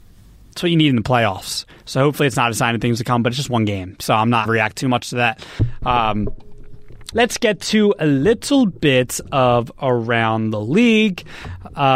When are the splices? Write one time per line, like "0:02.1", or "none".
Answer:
0:04.5
0:07.1